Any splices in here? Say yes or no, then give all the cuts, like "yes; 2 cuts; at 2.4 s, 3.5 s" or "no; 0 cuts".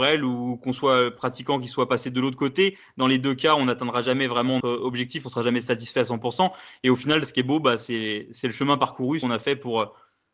yes; 2 cuts; at 4.6 s, 9.2 s